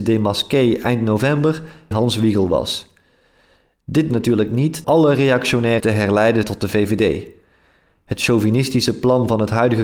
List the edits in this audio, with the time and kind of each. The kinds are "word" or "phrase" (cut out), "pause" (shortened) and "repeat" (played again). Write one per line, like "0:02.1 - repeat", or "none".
0:01.9 - word
0:04.1 - word
0:04.8 - word
0:05.8 - word
0:06.4 - word

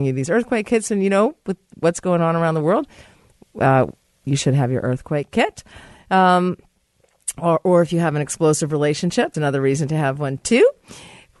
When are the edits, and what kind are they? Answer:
0:09.3 - word

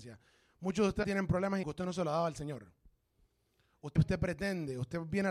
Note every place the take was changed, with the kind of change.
0:01.0 - word
0:01.6 - word
0:04.0 - word

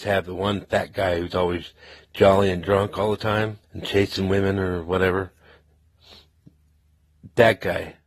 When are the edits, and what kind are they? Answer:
0:03.6 - pause

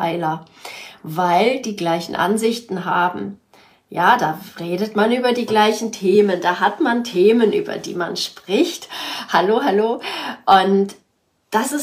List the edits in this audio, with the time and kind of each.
0:01.6 - word

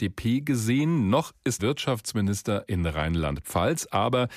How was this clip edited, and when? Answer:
0:01.6 - word

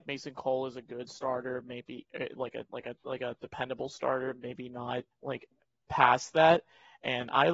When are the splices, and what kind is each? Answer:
0:05.1 - pause

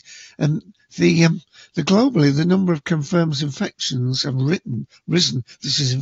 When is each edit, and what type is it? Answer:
none

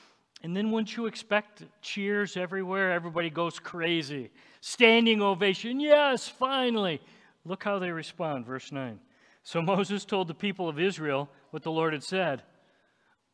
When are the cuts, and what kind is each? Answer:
none

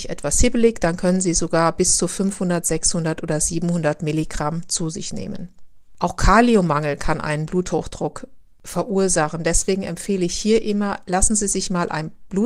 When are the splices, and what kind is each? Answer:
none

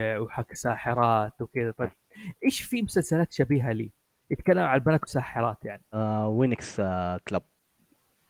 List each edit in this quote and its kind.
0:04.1 - pause
0:05.1 - word

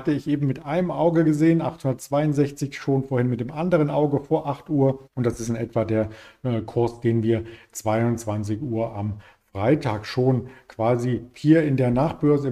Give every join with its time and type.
0:05.1 - pause

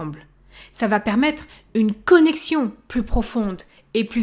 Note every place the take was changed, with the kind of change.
none

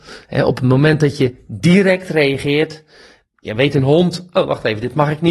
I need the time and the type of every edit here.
none

